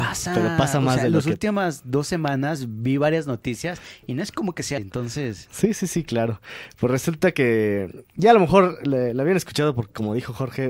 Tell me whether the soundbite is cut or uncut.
cut